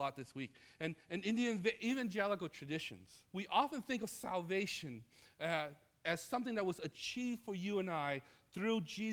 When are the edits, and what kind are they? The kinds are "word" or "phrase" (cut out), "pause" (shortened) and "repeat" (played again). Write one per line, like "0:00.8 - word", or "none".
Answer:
0:03.3 - pause